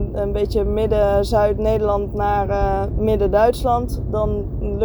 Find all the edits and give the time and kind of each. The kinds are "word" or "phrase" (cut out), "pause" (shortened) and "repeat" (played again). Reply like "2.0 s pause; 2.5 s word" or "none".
none